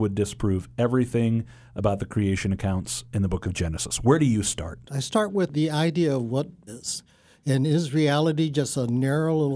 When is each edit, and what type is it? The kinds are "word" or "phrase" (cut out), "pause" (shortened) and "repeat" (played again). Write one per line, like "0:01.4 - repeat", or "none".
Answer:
0:04.8 - pause
0:06.7 - word